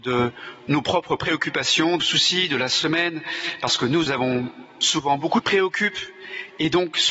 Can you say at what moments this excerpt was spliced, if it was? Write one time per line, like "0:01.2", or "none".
0:02.0
0:04.1
0:05.4